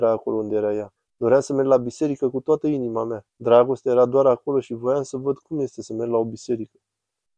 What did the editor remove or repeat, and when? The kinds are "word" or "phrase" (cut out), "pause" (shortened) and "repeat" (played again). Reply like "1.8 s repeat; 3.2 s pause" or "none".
1.0 s pause; 3.3 s pause